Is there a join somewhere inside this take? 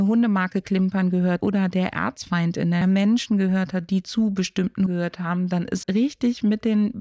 yes; 4 cuts; at 1.4 s, 2.8 s, 4.9 s, 5.8 s

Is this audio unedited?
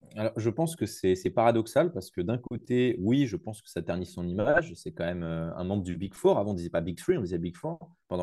yes; 0 cuts

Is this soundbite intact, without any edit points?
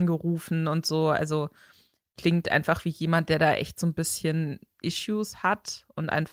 yes; 0 cuts

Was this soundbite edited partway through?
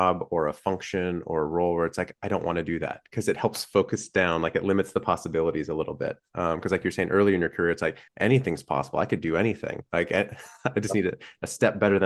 yes; 1 cut; at 8.1 s

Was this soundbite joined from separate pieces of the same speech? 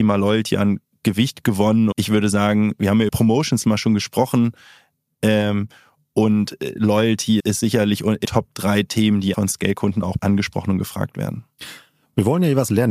yes; 7 cuts; at 1.9 s, 3.1 s, 3.6 s, 7.4 s, 8.2 s, 9.3 s, 10.2 s

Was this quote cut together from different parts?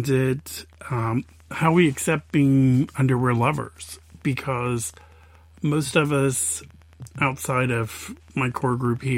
no; 0 cuts

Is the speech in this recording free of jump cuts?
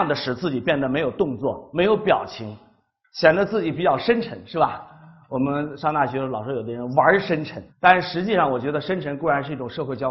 no; 1 cut; at 7.7 s

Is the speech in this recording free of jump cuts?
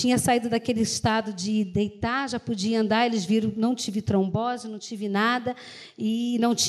yes; 0 cuts

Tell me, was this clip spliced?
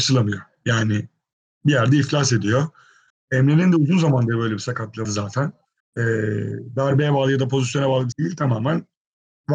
yes; 3 cuts; at 5.0 s, 5.8 s, 8.1 s

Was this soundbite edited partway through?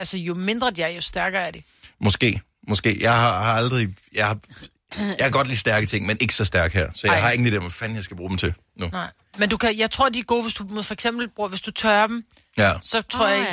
no; 0 cuts

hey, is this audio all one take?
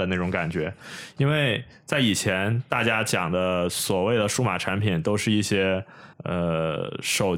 no; 1 cut; at 6.1 s

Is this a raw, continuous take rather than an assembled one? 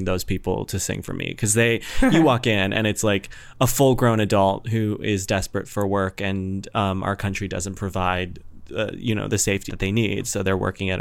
no; 1 cut; at 9.7 s

